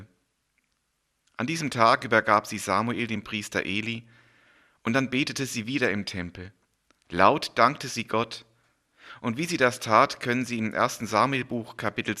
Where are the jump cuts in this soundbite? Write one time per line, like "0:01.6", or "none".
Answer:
none